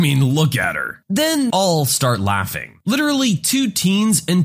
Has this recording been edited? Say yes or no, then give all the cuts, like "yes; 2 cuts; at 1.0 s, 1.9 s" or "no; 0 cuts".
yes; 1 cut; at 1.5 s